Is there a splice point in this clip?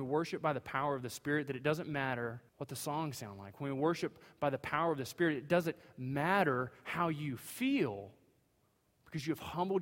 yes; 1 cut; at 2.5 s

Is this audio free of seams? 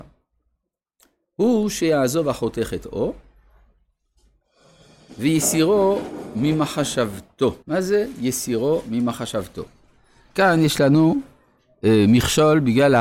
no; 1 cut; at 7.6 s

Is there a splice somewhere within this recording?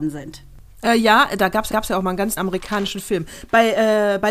yes; 2 cuts; at 1.7 s, 2.4 s

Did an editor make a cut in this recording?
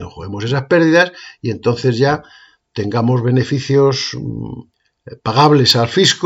no; 0 cuts

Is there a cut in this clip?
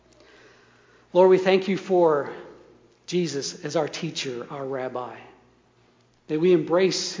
no; 0 cuts

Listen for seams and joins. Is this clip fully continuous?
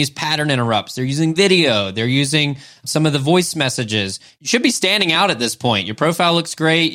yes; 0 cuts

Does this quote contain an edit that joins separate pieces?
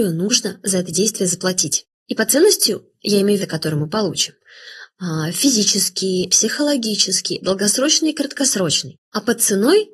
yes; 2 cuts; at 3.4 s, 6.3 s

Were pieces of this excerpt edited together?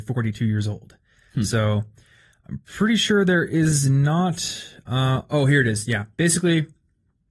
no; 0 cuts

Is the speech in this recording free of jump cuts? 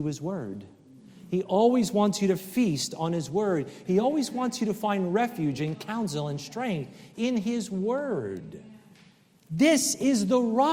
yes; 0 cuts

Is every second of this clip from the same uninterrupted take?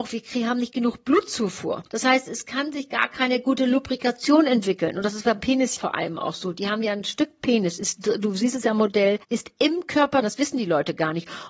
no; 3 cuts; at 5.8 s, 9.2 s, 10.2 s

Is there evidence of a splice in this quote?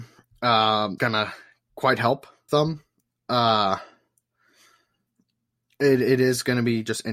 yes; 2 cuts; at 1.0 s, 2.5 s

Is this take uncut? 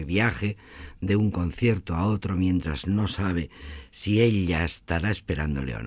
yes; 0 cuts

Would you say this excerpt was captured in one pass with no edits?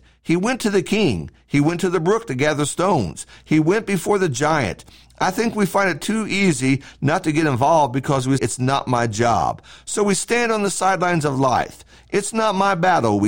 no; 1 cut; at 8.4 s

